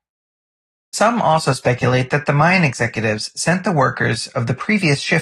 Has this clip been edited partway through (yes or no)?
no